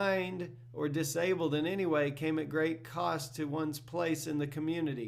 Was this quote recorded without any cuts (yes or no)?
yes